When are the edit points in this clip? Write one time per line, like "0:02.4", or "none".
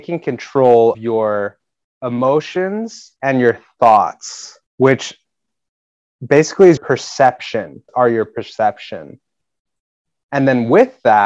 0:00.9
0:03.2
0:04.7
0:06.8
0:07.9